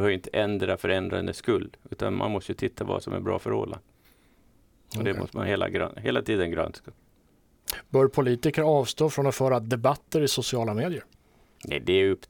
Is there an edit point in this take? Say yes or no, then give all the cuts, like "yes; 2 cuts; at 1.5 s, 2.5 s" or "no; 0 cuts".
no; 0 cuts